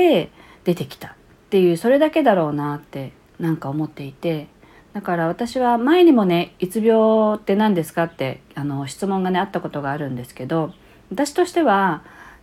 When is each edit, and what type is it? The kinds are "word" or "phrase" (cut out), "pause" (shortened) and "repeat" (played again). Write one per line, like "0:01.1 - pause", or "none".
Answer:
none